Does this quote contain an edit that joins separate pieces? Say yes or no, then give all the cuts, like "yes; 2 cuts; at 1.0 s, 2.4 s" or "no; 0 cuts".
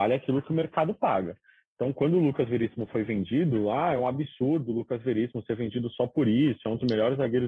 no; 0 cuts